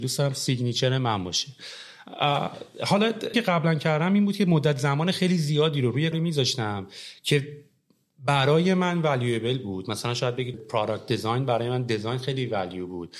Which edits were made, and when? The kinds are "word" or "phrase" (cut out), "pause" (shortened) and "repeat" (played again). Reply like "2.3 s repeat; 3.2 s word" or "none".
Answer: 3.3 s word; 6.1 s word; 10.5 s word